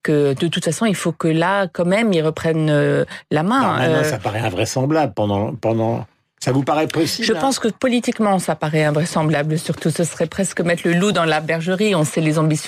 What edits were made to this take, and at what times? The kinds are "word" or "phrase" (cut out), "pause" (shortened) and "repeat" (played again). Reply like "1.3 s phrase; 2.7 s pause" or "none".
none